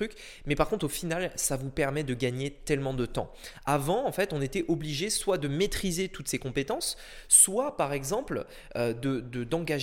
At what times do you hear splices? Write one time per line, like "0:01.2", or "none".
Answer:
none